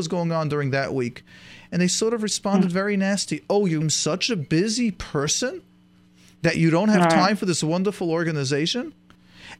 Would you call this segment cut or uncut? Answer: cut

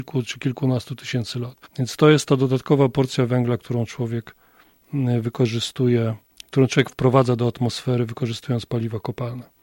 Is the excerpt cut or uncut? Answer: cut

